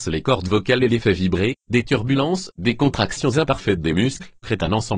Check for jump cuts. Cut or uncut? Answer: uncut